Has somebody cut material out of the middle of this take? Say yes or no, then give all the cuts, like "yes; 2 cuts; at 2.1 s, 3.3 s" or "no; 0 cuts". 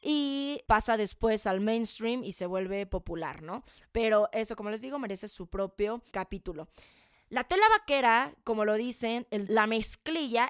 yes; 1 cut; at 9.5 s